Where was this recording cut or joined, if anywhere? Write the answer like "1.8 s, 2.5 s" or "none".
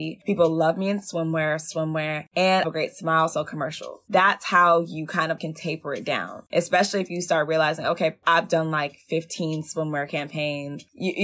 2.6 s, 5.4 s